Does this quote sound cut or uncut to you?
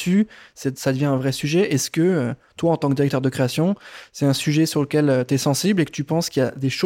uncut